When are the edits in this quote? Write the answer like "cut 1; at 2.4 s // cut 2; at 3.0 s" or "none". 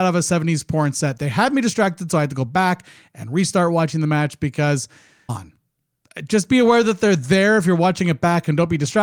cut 1; at 5.3 s